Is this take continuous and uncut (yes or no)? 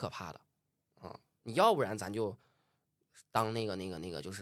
yes